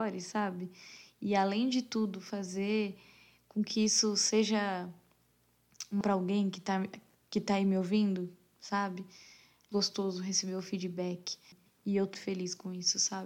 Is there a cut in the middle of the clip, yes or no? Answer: yes